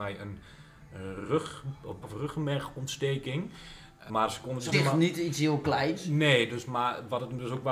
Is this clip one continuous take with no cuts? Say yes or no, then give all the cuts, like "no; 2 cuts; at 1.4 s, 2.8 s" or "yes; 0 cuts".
no; 3 cuts; at 2.0 s, 4.1 s, 4.7 s